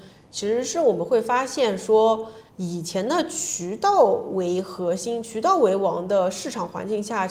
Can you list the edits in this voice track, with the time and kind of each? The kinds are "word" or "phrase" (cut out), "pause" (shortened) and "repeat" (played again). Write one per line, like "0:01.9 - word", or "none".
0:02.5 - pause